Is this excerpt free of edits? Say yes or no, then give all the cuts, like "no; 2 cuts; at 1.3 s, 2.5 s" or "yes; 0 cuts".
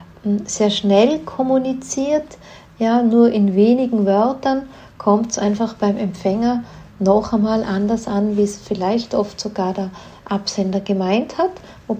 yes; 0 cuts